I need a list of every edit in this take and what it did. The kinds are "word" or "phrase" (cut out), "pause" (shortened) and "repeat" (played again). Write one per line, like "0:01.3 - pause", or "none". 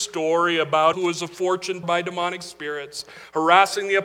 0:00.9 - phrase
0:01.8 - word